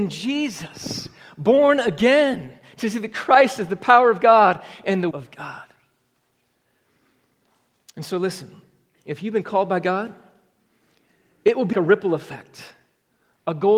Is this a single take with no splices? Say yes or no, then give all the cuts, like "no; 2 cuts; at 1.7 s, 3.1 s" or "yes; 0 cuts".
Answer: no; 2 cuts; at 5.1 s, 11.7 s